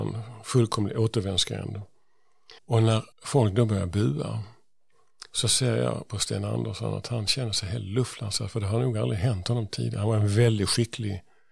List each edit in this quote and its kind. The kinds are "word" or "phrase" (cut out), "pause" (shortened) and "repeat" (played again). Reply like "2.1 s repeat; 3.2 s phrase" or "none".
2.6 s pause; 3.1 s pause

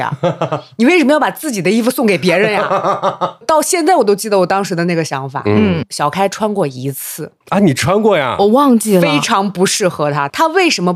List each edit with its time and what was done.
7.4 s pause

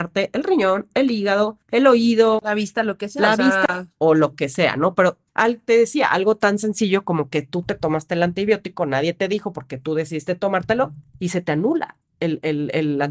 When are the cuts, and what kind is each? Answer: 1.6 s pause; 5.3 s pause; 11.1 s pause; 12.1 s pause

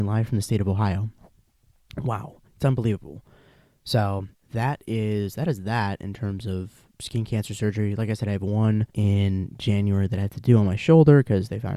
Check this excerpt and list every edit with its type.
2.5 s pause; 4.3 s pause; 6.9 s pause; 8.9 s pause

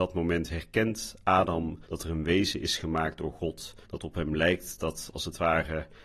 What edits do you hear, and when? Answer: 1.8 s pause; 3.8 s pause

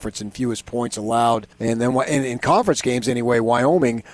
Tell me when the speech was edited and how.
1.5 s pause

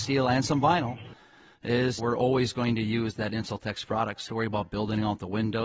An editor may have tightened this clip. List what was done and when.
2.0 s word; 4.3 s phrase

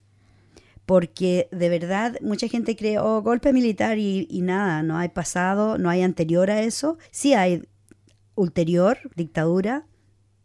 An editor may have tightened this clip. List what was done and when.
7.1 s pause; 9.1 s pause

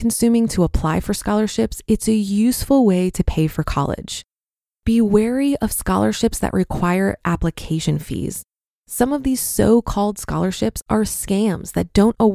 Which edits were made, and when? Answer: none

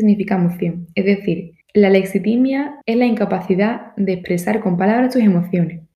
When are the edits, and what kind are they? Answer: 1.6 s pause; 2.8 s pause

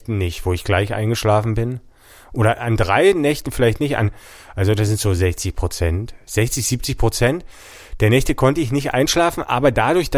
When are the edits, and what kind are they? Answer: none

